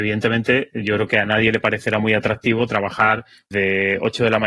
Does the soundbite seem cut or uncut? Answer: cut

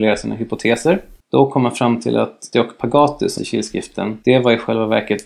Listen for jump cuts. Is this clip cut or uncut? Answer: cut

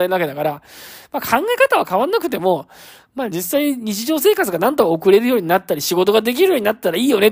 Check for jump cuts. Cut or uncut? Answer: uncut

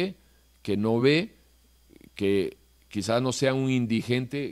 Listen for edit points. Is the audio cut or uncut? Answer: uncut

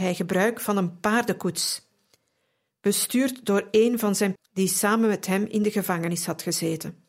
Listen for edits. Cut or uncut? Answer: cut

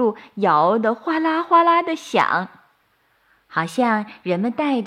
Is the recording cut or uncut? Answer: uncut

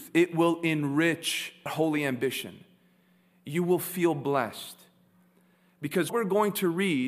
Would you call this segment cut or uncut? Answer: cut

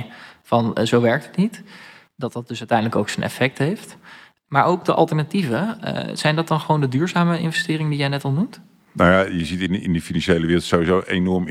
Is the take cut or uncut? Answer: uncut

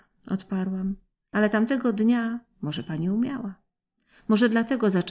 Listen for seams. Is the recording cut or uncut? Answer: uncut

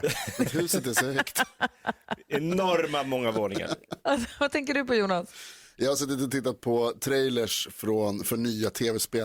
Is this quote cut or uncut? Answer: uncut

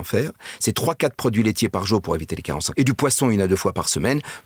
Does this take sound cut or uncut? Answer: cut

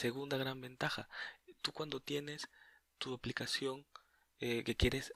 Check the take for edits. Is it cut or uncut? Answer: uncut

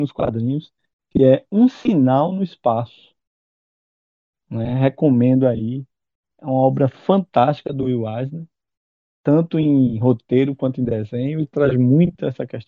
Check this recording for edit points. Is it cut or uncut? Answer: uncut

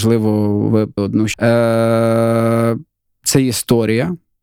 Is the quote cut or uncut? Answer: cut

